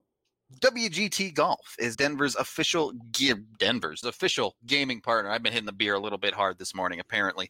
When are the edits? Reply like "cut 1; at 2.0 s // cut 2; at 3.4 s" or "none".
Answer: cut 1; at 1.9 s // cut 2; at 4.0 s